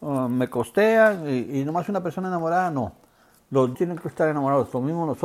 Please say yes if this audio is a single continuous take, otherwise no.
no